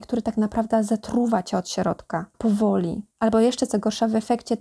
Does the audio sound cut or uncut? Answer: cut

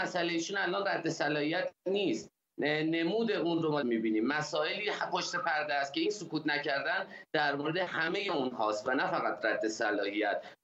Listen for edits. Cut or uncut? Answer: cut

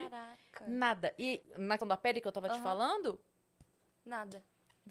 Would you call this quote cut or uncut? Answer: cut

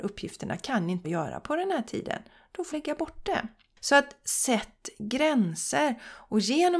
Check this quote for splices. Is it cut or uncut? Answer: cut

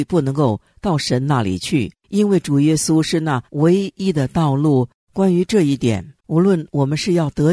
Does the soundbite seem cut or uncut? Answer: cut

